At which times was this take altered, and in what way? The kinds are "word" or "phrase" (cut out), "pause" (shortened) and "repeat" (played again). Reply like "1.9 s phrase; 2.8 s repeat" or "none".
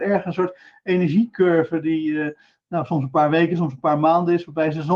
none